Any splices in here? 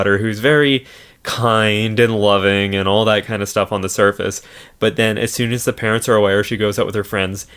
no; 0 cuts

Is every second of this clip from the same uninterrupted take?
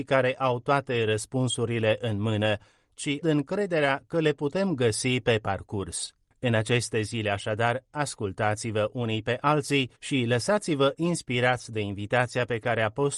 no; 2 cuts; at 3.2 s, 10.0 s

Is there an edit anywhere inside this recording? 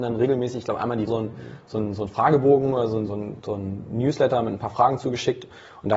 yes; 2 cuts; at 1.1 s, 3.1 s

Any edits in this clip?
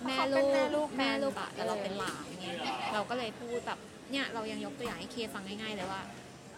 yes; 1 cut; at 1.3 s

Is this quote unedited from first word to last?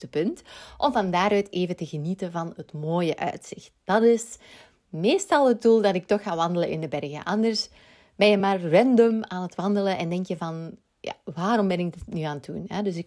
yes; 0 cuts

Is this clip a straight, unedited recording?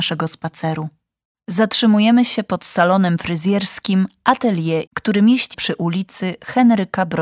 no; 2 cuts; at 4.9 s, 5.5 s

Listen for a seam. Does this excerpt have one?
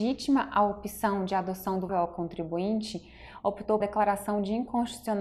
yes; 2 cuts; at 1.9 s, 3.8 s

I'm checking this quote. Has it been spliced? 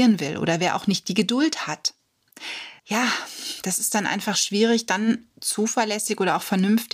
yes; 2 cuts; at 2.8 s, 5.3 s

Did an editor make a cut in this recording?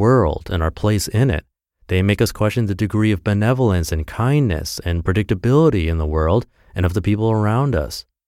no; 0 cuts

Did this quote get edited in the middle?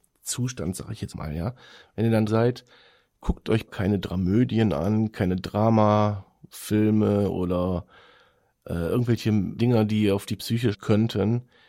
yes; 5 cuts; at 1.1 s, 2.3 s, 3.7 s, 9.6 s, 10.7 s

